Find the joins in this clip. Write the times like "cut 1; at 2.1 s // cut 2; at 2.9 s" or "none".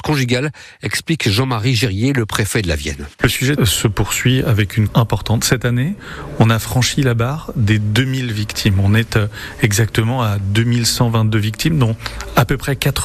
cut 1; at 3.1 s // cut 2; at 3.6 s // cut 3; at 4.9 s